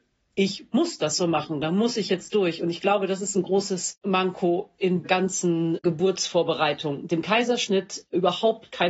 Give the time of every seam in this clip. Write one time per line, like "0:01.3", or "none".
0:05.0
0:07.1